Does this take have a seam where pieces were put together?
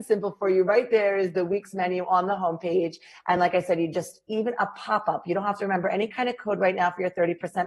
no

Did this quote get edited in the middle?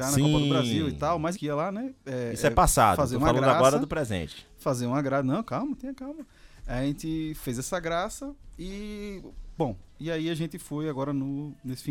yes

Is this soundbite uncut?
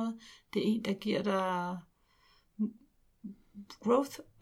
yes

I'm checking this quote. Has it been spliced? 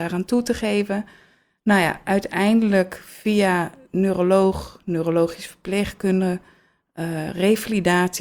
no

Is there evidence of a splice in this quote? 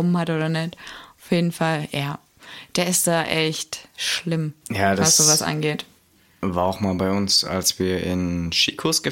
no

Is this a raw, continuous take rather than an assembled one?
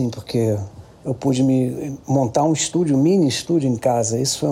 yes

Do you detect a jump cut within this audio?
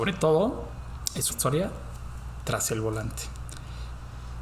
yes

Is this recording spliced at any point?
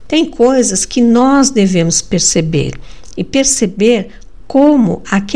no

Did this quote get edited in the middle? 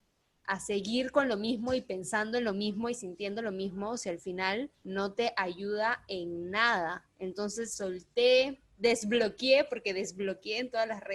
yes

